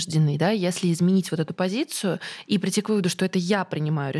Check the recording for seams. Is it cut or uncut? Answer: uncut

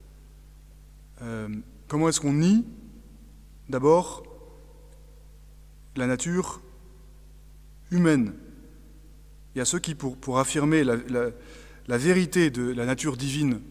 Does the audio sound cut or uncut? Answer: uncut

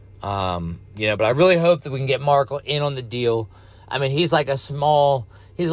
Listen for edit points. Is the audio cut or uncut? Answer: uncut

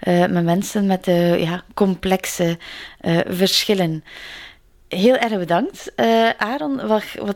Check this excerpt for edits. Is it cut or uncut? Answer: uncut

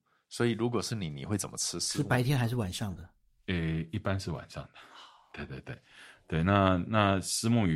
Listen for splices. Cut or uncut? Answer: uncut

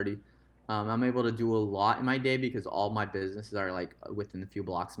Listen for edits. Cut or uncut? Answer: uncut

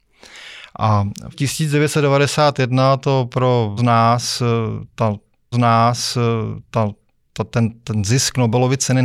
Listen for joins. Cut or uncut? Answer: cut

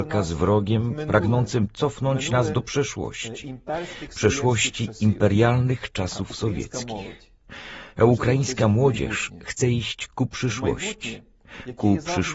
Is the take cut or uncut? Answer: uncut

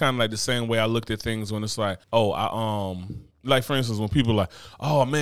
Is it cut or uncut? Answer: cut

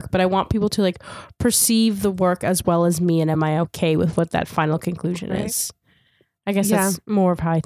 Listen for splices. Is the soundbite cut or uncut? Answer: uncut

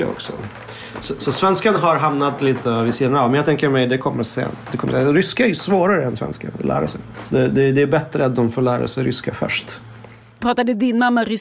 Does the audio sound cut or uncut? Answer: uncut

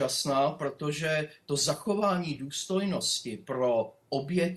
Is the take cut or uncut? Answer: uncut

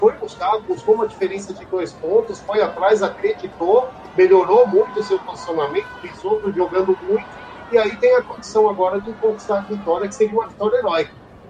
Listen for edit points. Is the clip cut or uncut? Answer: uncut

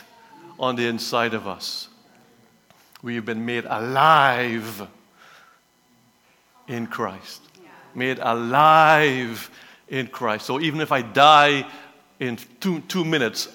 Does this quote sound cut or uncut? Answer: uncut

